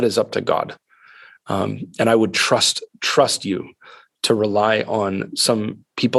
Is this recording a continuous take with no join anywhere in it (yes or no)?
yes